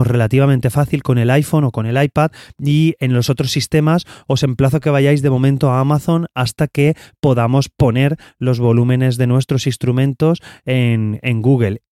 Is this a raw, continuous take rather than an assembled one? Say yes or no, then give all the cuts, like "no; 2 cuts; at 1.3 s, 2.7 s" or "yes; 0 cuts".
yes; 0 cuts